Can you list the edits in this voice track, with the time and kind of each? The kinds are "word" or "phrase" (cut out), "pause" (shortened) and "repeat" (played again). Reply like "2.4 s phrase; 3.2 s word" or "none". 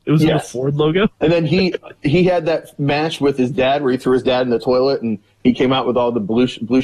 1.1 s pause